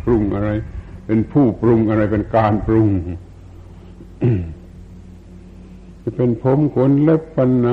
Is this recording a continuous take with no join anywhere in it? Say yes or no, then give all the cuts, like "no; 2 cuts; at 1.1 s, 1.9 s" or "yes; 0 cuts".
yes; 0 cuts